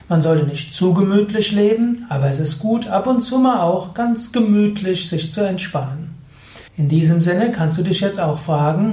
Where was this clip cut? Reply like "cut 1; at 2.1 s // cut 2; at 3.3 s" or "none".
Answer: cut 1; at 6.7 s